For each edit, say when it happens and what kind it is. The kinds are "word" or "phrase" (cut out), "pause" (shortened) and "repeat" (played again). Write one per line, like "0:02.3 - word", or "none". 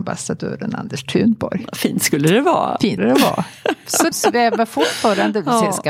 0:03.0 - word
0:04.1 - word